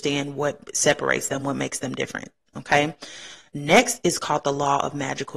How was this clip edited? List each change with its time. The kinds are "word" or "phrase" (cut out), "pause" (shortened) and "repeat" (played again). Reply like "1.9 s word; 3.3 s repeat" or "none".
none